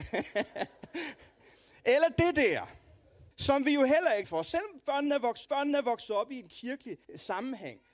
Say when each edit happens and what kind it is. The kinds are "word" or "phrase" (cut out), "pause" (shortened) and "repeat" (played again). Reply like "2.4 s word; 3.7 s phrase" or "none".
3.3 s pause; 4.2 s phrase; 5.4 s repeat; 7.0 s pause